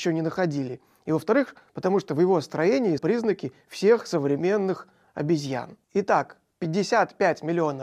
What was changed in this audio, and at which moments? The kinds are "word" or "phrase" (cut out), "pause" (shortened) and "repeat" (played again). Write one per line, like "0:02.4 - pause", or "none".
0:03.0 - word
0:05.1 - word
0:05.8 - pause